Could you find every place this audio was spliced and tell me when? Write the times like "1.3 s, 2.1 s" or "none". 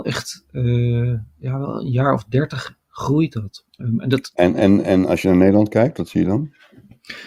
3.7 s